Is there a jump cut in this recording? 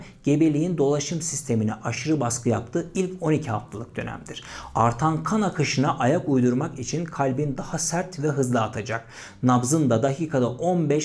no; 0 cuts

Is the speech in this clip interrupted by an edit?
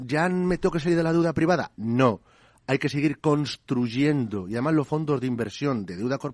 no; 0 cuts

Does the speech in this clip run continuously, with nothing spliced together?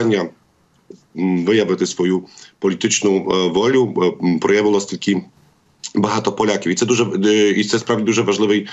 yes; 0 cuts

